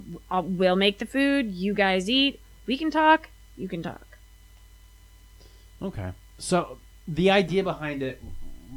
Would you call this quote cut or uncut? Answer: uncut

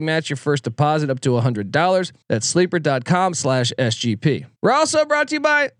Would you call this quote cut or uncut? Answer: cut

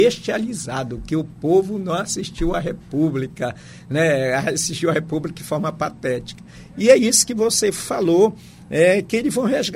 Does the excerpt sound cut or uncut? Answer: uncut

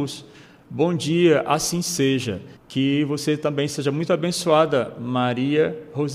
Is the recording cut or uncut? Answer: cut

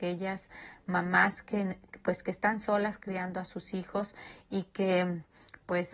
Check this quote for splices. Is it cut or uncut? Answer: uncut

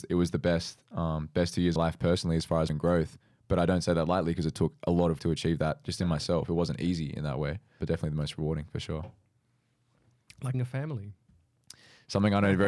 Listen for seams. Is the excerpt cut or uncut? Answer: cut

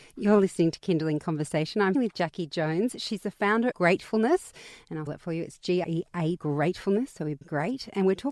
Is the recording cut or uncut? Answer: cut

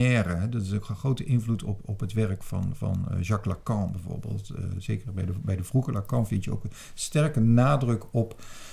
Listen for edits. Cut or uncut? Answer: uncut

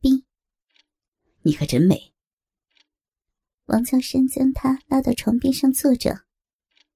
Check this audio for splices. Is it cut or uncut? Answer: uncut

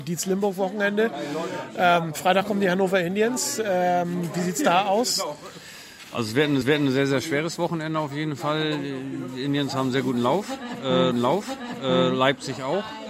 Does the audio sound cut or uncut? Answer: cut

